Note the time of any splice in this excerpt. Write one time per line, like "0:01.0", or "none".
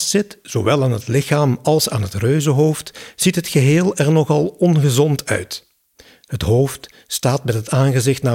none